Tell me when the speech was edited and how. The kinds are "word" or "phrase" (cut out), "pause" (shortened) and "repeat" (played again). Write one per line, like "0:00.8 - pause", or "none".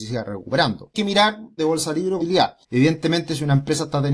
0:00.9 - phrase
0:01.6 - phrase
0:02.2 - phrase
0:02.6 - pause